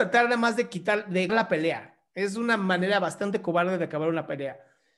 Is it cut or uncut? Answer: cut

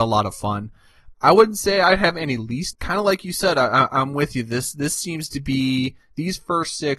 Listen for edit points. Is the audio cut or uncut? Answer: cut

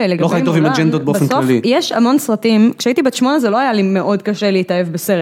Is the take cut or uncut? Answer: uncut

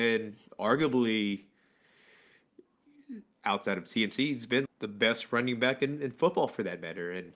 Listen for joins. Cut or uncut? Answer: cut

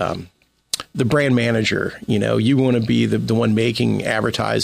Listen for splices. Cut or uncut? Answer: uncut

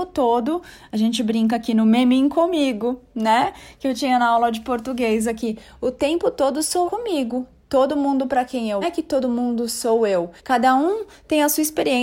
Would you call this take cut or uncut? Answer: cut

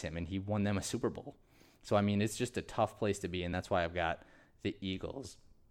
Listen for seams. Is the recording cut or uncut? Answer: uncut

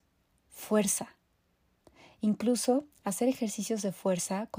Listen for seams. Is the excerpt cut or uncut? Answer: uncut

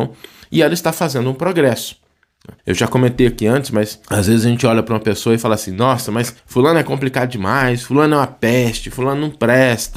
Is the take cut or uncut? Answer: cut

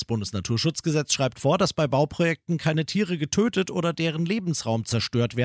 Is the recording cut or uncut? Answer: uncut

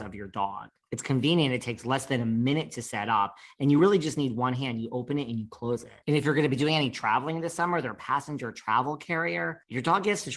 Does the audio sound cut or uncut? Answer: uncut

